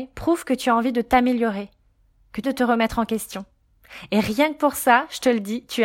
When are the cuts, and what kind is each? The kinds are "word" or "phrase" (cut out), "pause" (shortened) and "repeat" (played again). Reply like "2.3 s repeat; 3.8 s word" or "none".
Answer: 2.4 s word